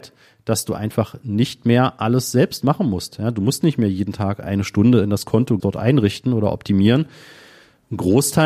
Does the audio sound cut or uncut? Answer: cut